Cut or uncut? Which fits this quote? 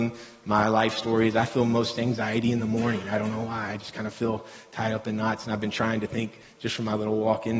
uncut